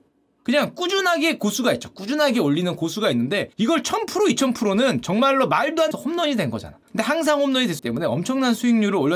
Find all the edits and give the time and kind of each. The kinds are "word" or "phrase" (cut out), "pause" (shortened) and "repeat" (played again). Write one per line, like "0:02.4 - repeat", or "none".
0:03.5 - pause
0:05.9 - phrase
0:06.8 - pause
0:07.8 - word

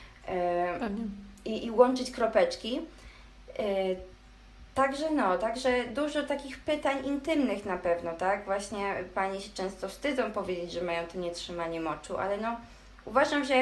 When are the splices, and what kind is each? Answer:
none

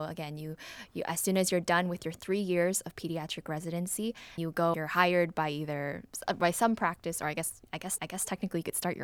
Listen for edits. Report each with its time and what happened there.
0:04.4 - word
0:04.7 - phrase
0:08.0 - repeat

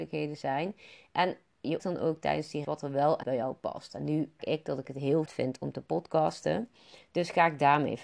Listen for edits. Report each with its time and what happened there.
0:01.8 - word
0:02.6 - word
0:03.2 - word
0:04.4 - word
0:05.3 - word

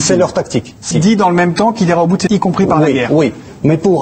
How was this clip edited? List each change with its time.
0:00.9 - word
0:02.3 - word

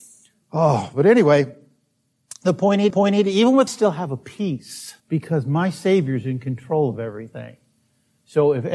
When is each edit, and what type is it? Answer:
0:02.9 - repeat
0:03.7 - phrase
0:05.0 - pause

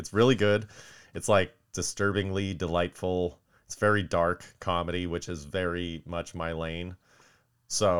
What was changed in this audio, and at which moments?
none

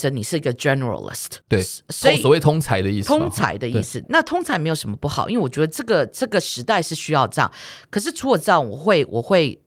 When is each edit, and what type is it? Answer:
0:01.4 - pause
0:04.0 - word

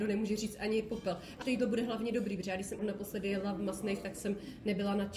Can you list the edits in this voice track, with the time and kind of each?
0:01.4 - word
0:02.8 - word

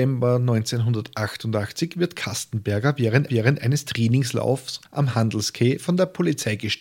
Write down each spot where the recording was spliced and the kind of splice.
0:03.3 - repeat
0:04.9 - pause

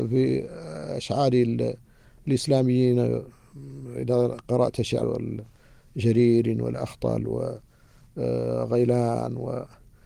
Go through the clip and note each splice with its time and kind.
0:05.0 - word

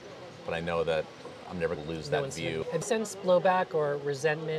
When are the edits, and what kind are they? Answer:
0:01.8 - word
0:02.8 - word

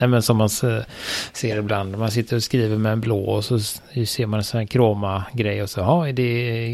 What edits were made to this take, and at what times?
none

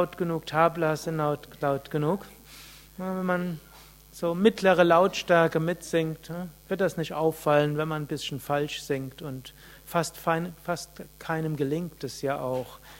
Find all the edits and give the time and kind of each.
none

